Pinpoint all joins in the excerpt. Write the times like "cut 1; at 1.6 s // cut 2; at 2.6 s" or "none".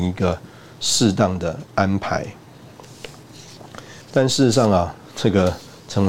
cut 1; at 4.0 s

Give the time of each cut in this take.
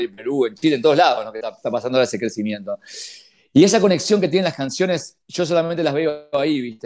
none

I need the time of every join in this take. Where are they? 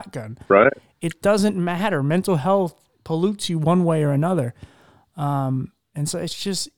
none

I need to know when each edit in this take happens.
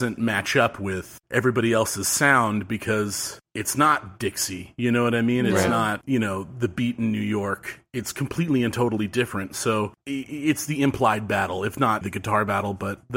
cut 1; at 12.0 s

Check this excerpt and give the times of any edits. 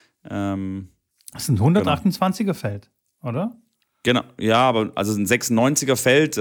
none

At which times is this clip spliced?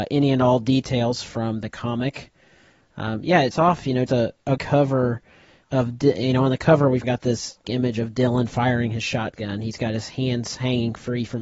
cut 1; at 3.5 s // cut 2; at 4.1 s // cut 3; at 4.6 s // cut 4; at 5.6 s // cut 5; at 7.0 s // cut 6; at 7.6 s

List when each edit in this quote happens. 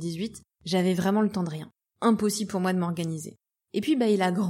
none

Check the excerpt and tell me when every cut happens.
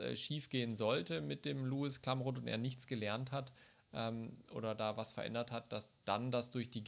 none

